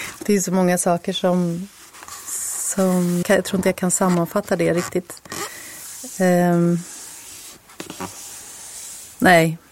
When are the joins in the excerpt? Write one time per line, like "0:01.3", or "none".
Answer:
0:03.2